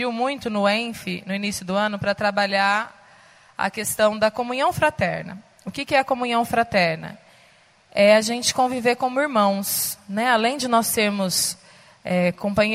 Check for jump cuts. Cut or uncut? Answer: uncut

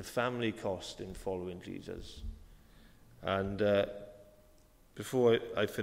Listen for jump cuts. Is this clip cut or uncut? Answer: uncut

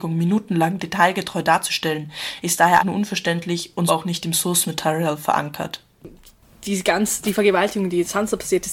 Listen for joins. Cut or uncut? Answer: cut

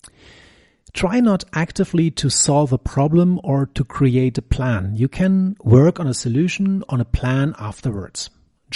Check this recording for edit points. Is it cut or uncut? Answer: cut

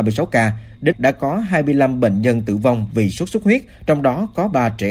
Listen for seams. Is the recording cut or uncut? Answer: cut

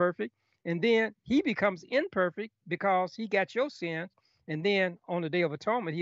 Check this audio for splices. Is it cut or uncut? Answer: uncut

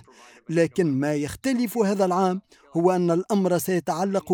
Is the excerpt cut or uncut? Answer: uncut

